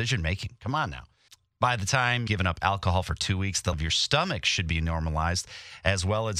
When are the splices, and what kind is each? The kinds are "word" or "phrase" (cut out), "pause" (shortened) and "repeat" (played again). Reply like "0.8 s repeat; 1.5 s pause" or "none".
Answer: 1.3 s pause; 2.3 s word; 3.7 s word